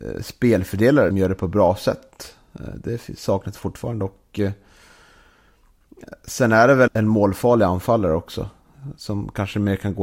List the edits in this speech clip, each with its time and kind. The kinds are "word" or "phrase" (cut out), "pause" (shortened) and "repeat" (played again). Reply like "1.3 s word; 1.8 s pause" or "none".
1.1 s phrase; 6.9 s word